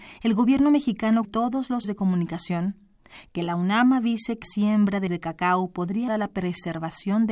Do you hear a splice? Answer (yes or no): yes